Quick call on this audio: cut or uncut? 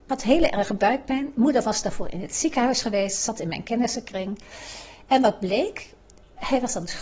uncut